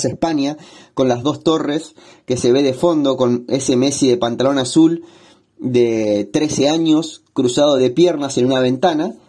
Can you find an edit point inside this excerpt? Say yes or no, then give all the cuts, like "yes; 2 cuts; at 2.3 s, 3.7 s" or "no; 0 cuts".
no; 0 cuts